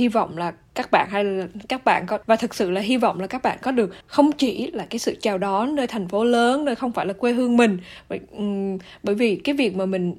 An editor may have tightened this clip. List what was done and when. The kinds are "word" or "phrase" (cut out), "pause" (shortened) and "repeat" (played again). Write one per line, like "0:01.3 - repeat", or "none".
0:02.2 - pause
0:04.0 - pause